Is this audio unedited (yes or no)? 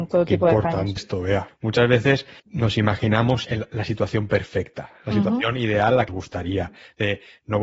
no